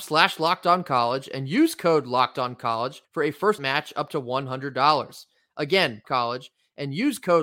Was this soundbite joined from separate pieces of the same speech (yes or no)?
yes